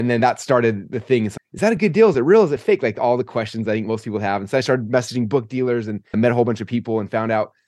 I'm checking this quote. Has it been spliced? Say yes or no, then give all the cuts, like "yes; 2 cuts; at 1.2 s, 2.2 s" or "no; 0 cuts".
yes; 2 cuts; at 1.4 s, 6.1 s